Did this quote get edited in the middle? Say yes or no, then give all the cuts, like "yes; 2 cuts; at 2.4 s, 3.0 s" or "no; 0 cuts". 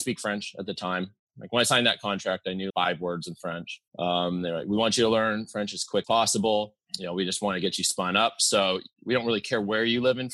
yes; 4 cuts; at 2.7 s, 3.9 s, 6.0 s, 6.9 s